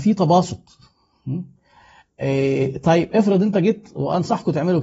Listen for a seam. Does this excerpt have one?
no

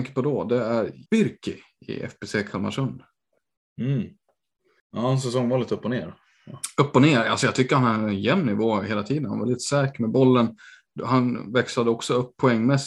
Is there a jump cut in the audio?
yes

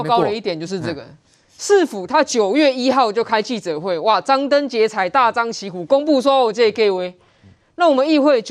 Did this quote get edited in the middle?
no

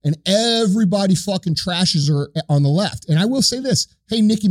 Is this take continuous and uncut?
yes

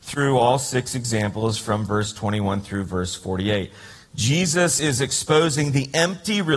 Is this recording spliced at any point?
no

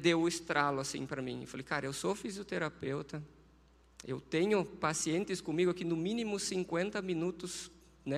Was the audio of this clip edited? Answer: no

